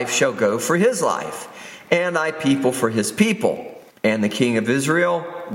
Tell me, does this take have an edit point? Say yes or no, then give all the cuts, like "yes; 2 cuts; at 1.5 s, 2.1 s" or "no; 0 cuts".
yes; 1 cut; at 3.9 s